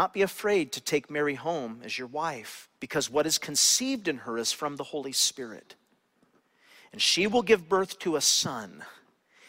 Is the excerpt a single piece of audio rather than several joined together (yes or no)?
no